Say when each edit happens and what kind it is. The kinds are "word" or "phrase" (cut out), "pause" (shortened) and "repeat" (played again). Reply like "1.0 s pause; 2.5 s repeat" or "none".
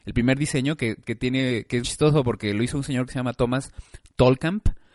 1.8 s word